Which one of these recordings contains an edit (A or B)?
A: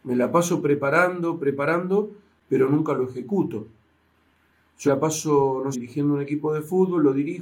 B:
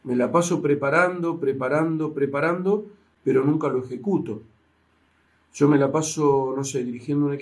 A